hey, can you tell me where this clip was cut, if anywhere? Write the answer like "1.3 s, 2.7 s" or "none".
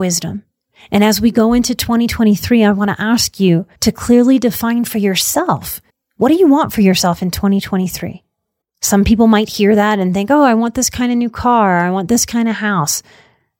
3.8 s, 5.9 s, 8.6 s